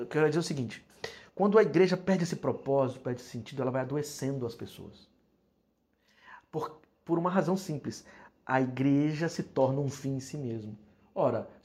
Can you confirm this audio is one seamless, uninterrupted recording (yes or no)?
yes